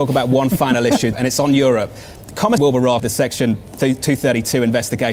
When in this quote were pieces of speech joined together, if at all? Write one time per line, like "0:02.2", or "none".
0:01.1
0:02.6
0:03.0